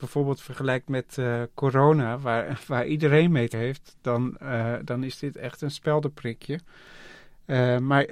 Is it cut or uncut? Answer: cut